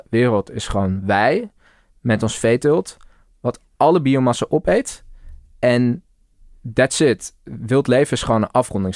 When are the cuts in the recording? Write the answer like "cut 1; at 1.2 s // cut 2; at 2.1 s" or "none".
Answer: none

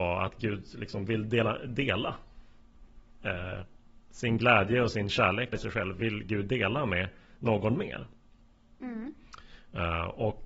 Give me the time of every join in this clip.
cut 1; at 5.5 s

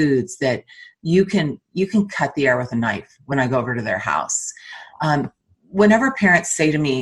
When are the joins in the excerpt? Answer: none

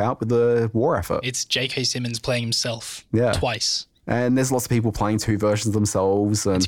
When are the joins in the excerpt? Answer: none

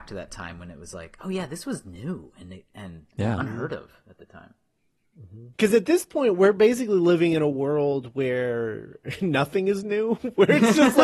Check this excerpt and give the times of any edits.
cut 1; at 5.5 s

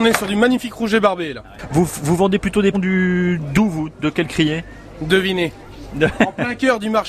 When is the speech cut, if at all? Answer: cut 1; at 2.7 s

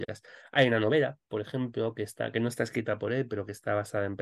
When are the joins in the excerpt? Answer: none

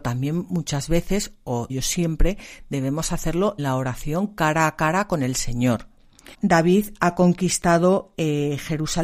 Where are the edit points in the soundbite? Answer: cut 1; at 1.7 s // cut 2; at 3.6 s // cut 3; at 6.3 s

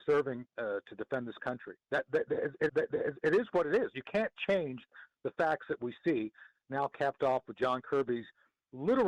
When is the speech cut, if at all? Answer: cut 1; at 2.7 s

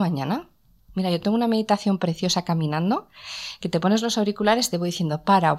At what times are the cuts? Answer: none

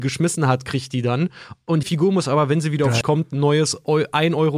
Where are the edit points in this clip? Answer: cut 1; at 1.8 s // cut 2; at 3.0 s

